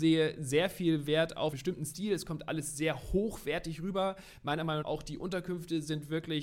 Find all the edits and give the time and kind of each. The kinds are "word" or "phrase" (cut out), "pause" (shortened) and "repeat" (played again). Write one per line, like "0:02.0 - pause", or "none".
0:01.5 - word
0:04.8 - word